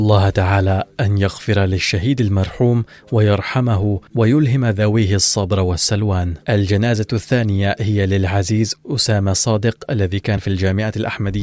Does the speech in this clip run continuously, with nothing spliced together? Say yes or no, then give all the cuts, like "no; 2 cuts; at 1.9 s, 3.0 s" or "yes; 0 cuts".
no; 3 cuts; at 4.1 s, 6.4 s, 10.4 s